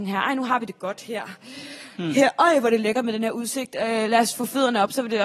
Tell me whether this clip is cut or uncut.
uncut